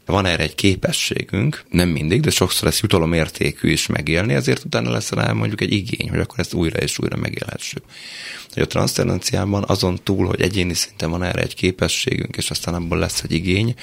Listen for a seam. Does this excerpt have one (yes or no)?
yes